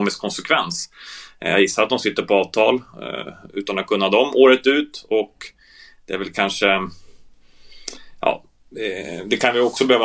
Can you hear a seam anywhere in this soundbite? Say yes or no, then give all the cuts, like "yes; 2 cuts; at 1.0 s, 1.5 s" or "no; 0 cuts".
no; 0 cuts